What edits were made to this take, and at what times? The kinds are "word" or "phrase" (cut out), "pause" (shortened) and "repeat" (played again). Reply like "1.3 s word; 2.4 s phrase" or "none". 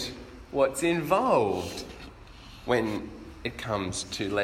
none